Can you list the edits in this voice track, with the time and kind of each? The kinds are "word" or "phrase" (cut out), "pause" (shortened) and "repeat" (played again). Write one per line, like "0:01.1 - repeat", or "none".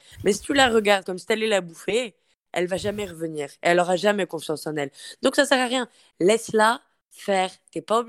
none